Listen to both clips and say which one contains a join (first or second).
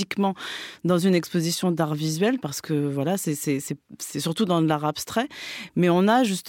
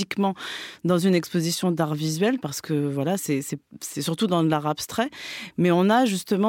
second